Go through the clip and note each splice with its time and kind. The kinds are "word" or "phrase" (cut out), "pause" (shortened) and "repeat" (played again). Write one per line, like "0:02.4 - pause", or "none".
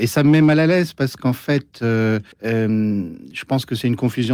0:02.3 - pause